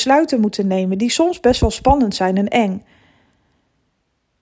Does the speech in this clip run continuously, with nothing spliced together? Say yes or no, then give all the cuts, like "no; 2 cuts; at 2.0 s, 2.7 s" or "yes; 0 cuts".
yes; 0 cuts